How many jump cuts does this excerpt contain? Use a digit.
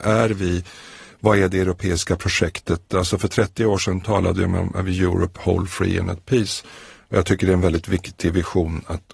0